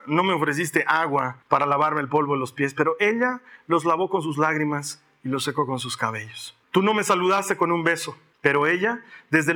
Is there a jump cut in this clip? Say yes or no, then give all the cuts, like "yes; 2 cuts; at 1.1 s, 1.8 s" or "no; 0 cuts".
yes; 3 cuts; at 1.4 s, 6.6 s, 8.3 s